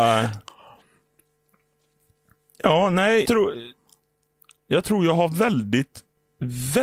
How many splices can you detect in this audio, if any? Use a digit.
1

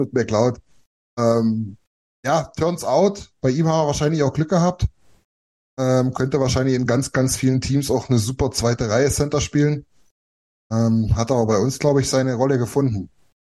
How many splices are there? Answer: 0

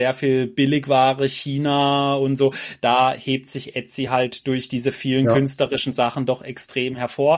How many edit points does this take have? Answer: 0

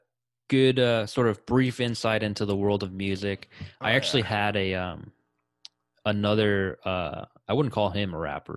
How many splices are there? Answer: 0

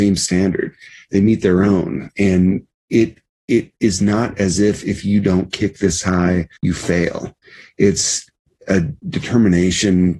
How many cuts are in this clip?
2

